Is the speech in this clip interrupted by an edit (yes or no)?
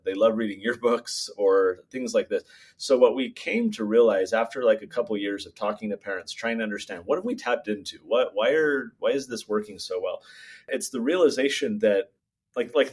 no